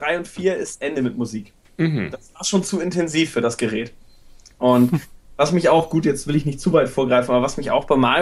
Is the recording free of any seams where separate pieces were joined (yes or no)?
yes